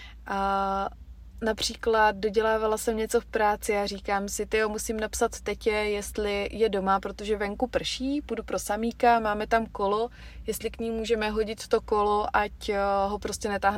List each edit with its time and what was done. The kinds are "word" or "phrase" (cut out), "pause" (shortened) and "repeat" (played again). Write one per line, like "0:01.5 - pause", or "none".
none